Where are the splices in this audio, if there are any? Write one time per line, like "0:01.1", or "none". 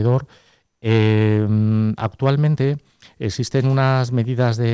none